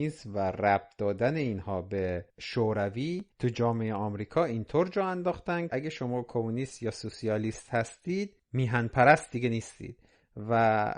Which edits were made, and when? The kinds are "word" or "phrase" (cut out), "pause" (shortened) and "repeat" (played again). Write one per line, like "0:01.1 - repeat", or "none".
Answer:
0:03.3 - pause
0:05.7 - word